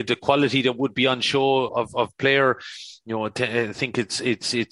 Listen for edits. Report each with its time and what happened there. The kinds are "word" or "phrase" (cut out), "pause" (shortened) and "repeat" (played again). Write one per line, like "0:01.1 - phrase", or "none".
0:01.7 - word